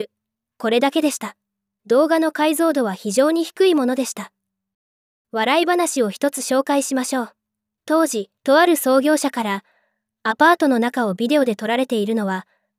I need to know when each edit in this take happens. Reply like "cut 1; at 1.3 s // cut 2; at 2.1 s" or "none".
cut 1; at 8.4 s